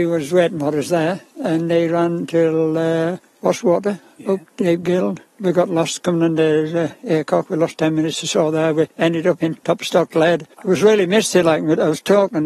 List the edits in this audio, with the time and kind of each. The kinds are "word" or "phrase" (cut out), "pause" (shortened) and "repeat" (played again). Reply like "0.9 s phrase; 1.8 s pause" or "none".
3.2 s pause; 8.9 s pause; 10.5 s pause